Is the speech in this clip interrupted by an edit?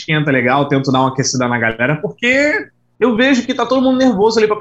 no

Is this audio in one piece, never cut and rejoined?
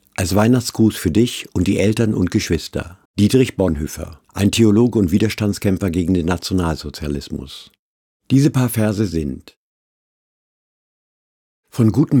no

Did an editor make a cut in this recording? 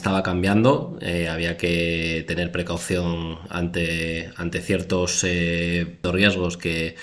no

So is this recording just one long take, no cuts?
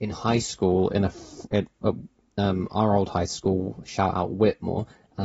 yes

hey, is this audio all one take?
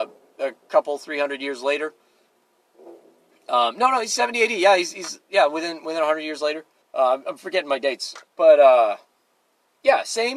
no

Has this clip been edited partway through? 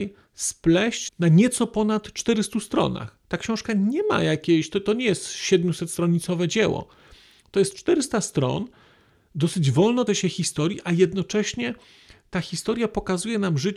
yes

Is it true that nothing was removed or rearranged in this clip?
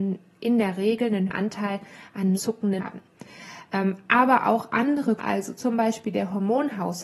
no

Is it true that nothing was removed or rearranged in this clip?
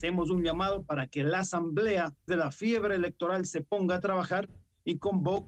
no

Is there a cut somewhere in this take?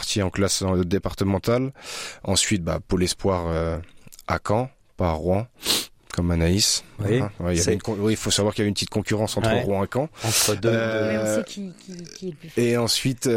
no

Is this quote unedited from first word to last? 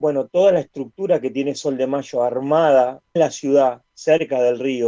no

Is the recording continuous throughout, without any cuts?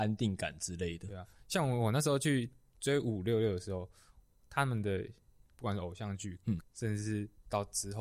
no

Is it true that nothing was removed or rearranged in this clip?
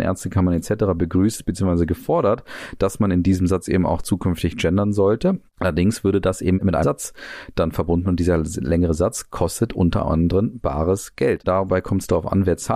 no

